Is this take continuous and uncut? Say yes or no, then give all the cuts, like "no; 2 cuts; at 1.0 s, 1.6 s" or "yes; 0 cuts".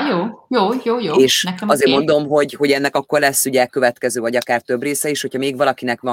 yes; 0 cuts